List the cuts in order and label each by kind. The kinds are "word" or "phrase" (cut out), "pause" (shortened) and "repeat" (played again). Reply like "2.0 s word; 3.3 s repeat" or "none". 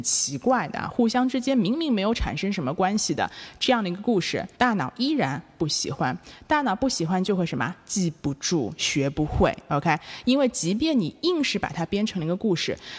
4.5 s pause